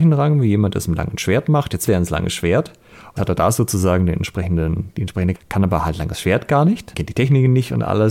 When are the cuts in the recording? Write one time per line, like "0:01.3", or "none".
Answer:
0:01.9
0:03.2
0:05.3
0:06.9